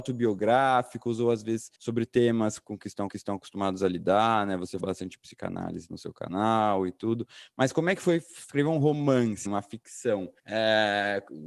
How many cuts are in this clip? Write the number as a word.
five